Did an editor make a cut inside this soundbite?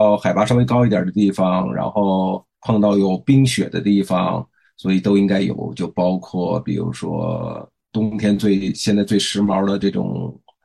yes; 2 cuts; at 2.5 s, 4.6 s

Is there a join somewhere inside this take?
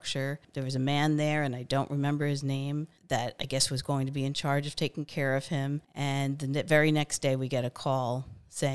no; 0 cuts

